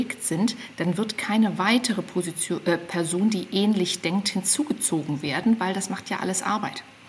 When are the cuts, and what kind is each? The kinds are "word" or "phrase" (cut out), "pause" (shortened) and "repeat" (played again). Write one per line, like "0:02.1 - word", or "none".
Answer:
none